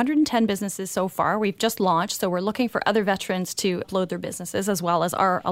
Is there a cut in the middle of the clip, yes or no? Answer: yes